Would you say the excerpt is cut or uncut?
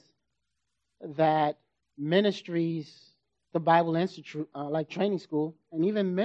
cut